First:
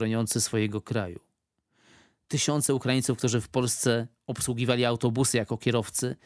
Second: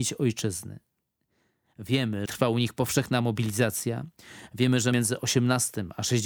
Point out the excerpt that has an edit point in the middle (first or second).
second